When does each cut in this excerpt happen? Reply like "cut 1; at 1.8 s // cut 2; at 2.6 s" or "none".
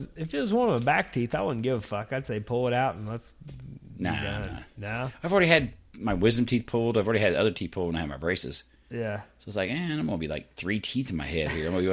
cut 1; at 10.5 s